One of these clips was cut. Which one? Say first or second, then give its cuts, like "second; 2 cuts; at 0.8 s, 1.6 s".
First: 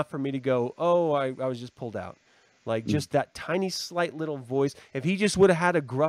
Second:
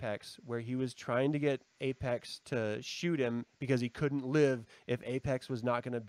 second; 1 cut; at 1.7 s